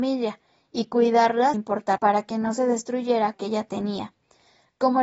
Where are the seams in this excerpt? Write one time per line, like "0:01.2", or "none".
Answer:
0:01.5
0:02.0
0:03.3